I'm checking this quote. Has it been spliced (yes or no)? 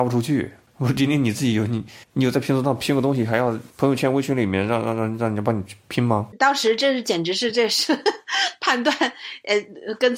yes